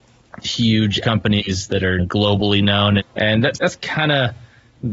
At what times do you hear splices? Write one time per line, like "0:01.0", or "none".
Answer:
0:01.0
0:02.0
0:03.0
0:03.5